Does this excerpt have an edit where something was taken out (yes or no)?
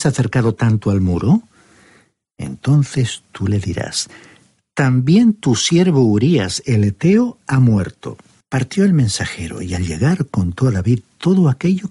no